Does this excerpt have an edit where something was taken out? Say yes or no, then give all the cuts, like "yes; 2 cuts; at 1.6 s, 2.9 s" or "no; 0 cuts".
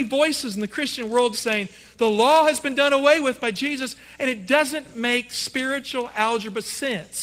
yes; 1 cut; at 1.3 s